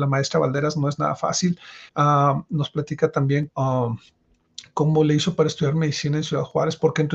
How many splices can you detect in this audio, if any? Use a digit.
2